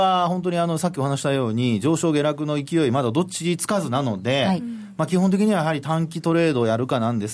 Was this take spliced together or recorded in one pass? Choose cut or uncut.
uncut